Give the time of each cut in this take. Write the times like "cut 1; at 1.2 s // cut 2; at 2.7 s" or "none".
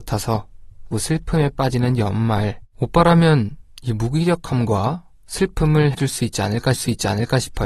cut 1; at 0.9 s // cut 2; at 2.7 s // cut 3; at 5.9 s // cut 4; at 6.7 s